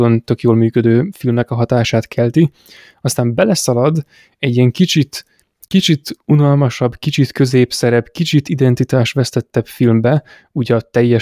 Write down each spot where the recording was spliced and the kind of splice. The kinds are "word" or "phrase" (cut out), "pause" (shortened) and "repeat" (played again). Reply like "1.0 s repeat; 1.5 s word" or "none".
none